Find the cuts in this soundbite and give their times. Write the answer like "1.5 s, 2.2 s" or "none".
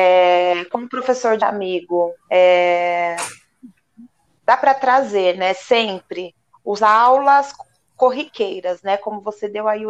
1.4 s, 2.2 s, 6.8 s